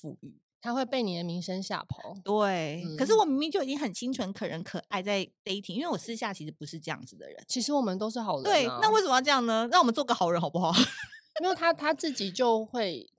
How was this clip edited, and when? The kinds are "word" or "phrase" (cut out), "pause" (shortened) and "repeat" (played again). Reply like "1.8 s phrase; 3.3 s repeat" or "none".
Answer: none